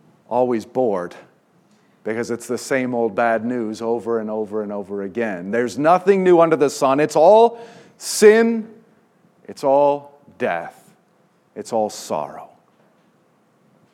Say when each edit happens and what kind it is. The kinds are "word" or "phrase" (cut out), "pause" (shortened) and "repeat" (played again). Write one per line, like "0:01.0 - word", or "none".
none